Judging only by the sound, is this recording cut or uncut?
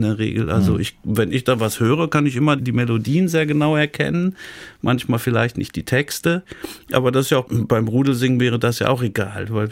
cut